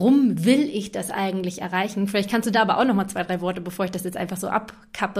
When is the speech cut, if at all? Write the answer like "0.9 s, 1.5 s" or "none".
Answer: none

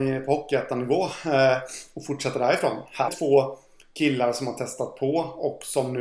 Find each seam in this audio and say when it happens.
3.1 s

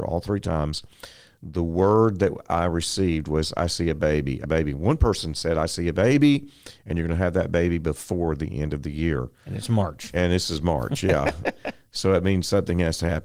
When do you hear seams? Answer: 4.4 s

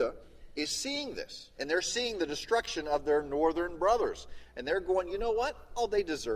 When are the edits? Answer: none

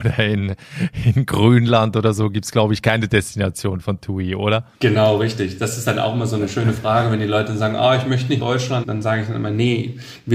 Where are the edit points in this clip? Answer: 4.7 s, 8.4 s, 8.8 s

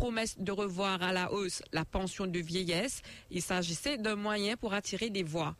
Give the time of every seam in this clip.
none

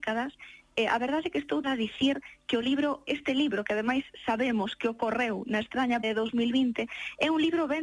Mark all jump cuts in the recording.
1.6 s, 3.1 s, 6.0 s

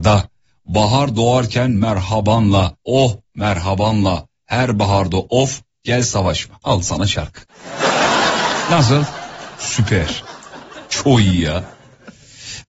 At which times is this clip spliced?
2.8 s, 6.6 s

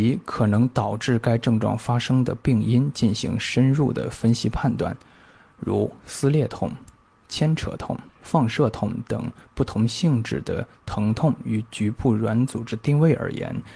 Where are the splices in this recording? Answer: 8.1 s

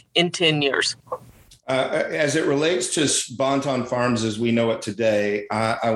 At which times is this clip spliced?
none

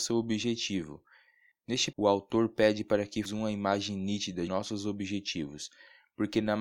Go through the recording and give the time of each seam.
1.9 s, 3.3 s, 4.5 s

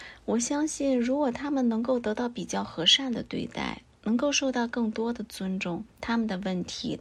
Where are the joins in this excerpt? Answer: 5.9 s

